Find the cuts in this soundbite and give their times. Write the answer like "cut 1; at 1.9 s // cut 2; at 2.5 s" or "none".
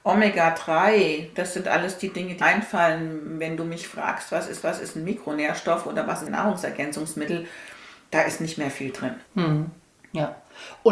cut 1; at 2.4 s // cut 2; at 4.6 s // cut 3; at 6.3 s // cut 4; at 9.3 s